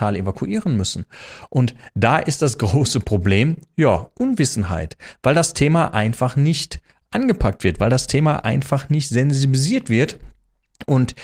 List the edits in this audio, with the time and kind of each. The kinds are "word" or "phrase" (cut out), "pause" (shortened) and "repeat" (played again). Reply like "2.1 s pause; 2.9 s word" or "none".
none